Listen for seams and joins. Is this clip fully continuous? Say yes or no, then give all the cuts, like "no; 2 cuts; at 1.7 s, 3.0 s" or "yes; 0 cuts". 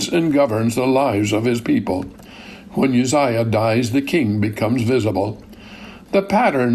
yes; 0 cuts